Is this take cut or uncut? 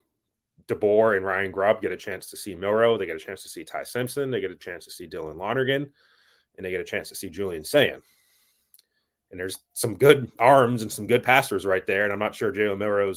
uncut